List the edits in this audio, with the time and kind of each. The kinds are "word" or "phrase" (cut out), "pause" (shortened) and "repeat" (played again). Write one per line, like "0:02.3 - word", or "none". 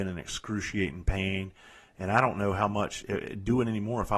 none